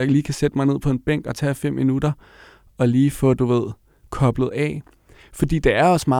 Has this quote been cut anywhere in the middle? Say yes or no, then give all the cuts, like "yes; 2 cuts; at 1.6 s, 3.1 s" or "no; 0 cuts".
no; 0 cuts